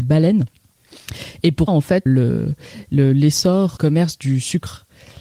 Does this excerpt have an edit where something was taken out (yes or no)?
yes